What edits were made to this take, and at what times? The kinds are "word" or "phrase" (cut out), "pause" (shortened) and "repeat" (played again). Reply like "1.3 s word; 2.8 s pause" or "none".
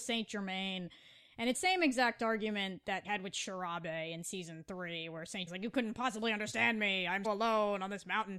1.5 s word; 3.0 s word; 5.5 s word; 7.2 s word

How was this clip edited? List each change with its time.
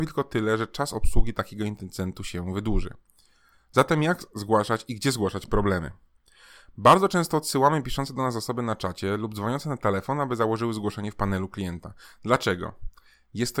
none

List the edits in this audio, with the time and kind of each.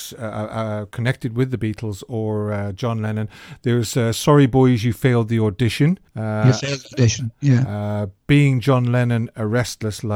6.1 s pause

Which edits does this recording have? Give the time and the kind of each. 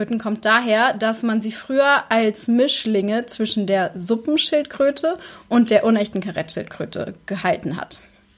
none

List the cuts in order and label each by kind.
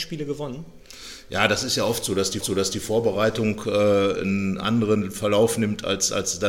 2.4 s repeat

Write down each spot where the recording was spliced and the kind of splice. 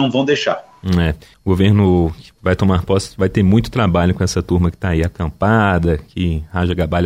none

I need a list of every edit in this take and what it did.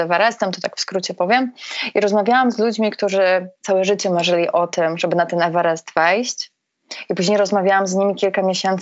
3.5 s pause

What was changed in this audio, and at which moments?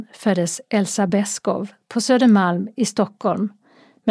none

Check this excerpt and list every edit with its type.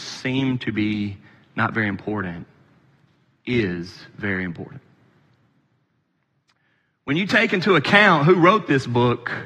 none

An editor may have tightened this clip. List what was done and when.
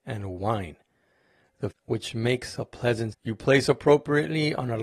1.7 s phrase; 3.1 s word

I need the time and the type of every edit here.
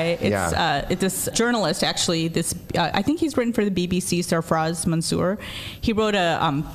1.3 s word

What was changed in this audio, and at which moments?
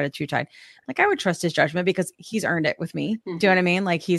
3.2 s pause

